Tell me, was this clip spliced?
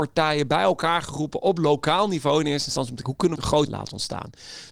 yes; 3 cuts; at 3.0 s, 3.4 s, 3.7 s

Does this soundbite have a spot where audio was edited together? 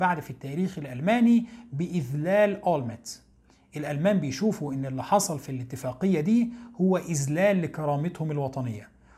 no; 0 cuts

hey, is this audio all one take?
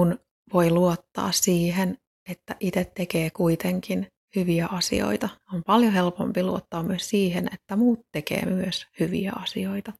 yes; 0 cuts

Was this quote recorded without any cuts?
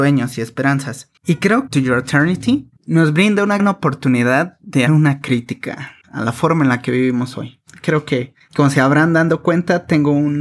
no; 6 cuts; at 1.2 s, 1.7 s, 2.8 s, 3.6 s, 4.9 s, 6.0 s

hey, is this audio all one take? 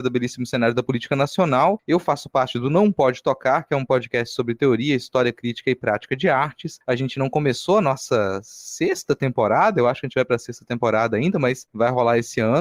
yes; 0 cuts

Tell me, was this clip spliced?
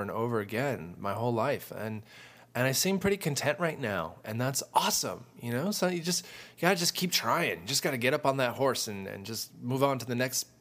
no; 0 cuts

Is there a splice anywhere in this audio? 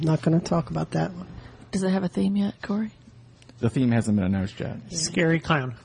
no; 0 cuts

